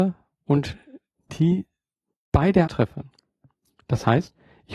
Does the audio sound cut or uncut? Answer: cut